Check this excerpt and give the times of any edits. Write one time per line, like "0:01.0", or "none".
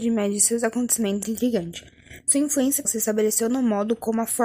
0:01.2
0:02.9